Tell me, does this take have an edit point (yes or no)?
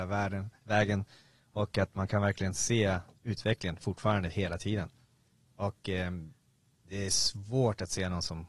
no